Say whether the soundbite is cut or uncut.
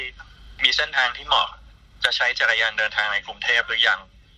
uncut